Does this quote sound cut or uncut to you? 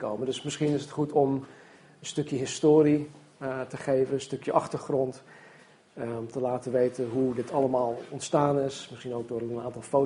uncut